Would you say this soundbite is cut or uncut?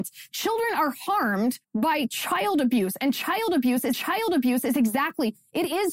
cut